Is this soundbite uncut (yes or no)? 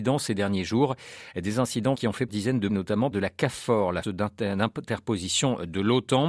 no